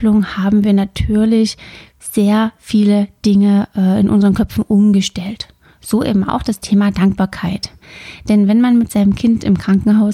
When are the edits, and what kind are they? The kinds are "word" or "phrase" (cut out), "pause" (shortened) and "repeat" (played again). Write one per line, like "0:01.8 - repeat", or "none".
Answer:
none